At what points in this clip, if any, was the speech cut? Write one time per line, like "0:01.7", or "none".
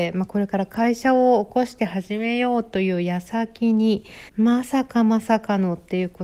0:04.3